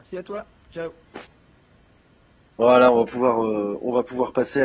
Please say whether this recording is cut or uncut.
uncut